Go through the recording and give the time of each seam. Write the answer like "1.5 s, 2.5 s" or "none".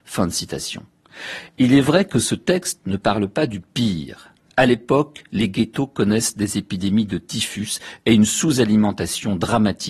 none